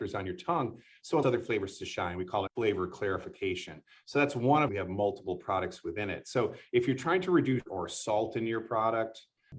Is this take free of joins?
no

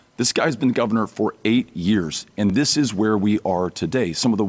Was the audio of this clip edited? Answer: no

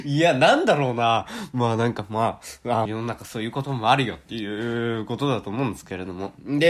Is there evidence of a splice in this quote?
yes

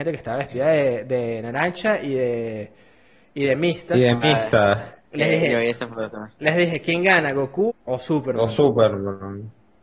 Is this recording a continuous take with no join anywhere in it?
no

